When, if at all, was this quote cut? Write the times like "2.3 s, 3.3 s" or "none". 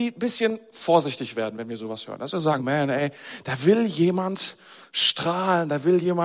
2.6 s